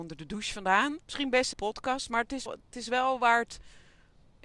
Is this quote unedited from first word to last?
no; 3 cuts; at 1.0 s, 1.5 s, 2.5 s

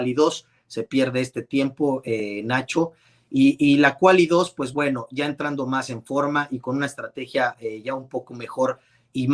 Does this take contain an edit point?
no; 0 cuts

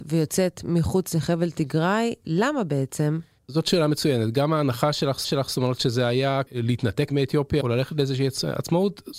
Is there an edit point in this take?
yes; 3 cuts; at 5.2 s, 6.5 s, 7.6 s

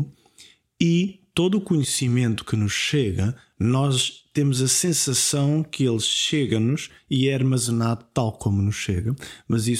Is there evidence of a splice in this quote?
no; 0 cuts

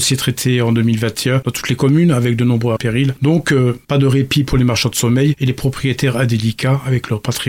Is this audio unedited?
no; 1 cut; at 2.8 s

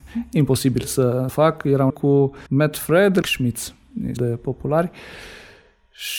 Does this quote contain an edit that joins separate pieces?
yes; 5 cuts; at 1.3 s, 1.9 s, 2.5 s, 3.2 s, 4.2 s

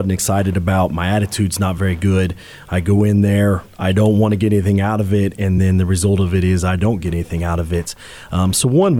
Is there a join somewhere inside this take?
no; 0 cuts

